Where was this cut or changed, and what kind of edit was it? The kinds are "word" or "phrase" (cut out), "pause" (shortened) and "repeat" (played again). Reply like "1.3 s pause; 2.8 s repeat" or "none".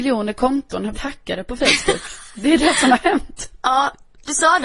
0.9 s word